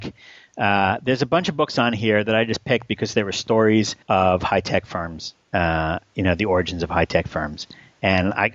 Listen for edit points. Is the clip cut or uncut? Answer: cut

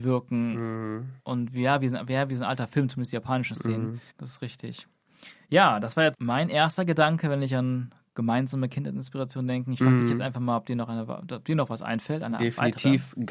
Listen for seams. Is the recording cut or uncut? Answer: cut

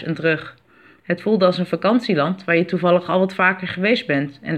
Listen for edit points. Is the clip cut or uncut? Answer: uncut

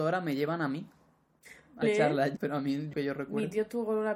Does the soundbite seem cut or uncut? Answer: cut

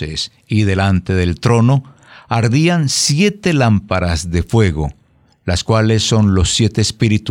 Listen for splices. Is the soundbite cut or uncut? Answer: uncut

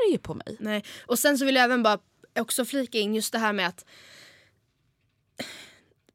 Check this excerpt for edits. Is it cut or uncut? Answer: uncut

